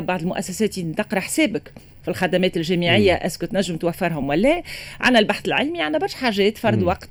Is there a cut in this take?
no; 0 cuts

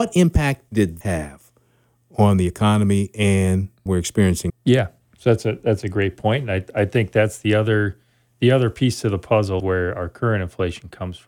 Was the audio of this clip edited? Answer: yes; 4 cuts; at 1.0 s, 3.9 s, 4.5 s, 9.6 s

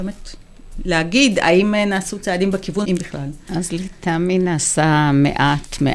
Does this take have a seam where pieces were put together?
yes; 1 cut; at 2.8 s

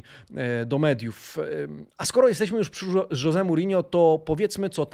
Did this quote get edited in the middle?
no; 0 cuts

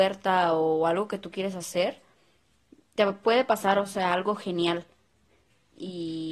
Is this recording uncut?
yes; 0 cuts

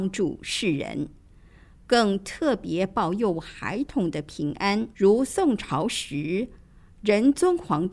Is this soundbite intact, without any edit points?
no; 1 cut; at 4.9 s

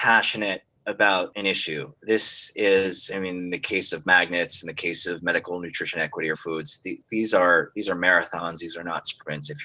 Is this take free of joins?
no; 1 cut; at 6.3 s

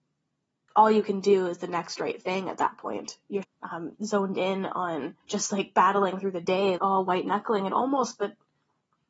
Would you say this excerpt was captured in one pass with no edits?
no; 3 cuts; at 3.4 s, 5.2 s, 6.8 s

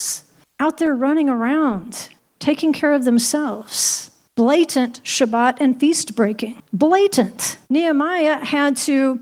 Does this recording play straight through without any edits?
no; 1 cut; at 7.6 s

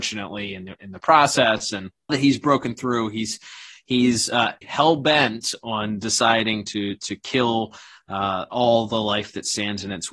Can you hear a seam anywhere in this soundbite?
yes; 2 cuts; at 2.1 s, 4.6 s

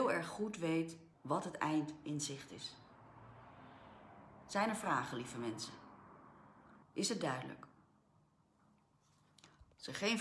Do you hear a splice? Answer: yes; 2 cuts; at 1.1 s, 6.8 s

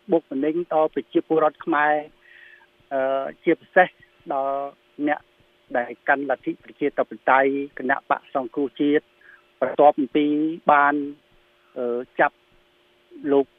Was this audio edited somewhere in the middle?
yes; 1 cut; at 7.7 s

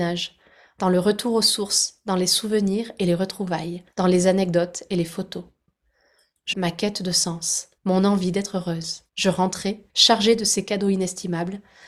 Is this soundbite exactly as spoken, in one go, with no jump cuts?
no; 5 cuts; at 3.9 s, 6.5 s, 7.8 s, 9.1 s, 9.9 s

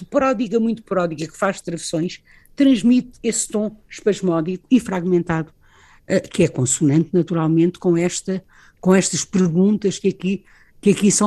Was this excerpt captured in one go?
yes; 0 cuts

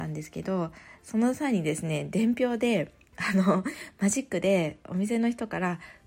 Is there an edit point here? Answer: no; 0 cuts

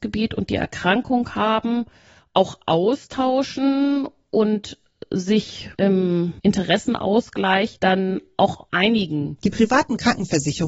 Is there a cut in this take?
no; 0 cuts

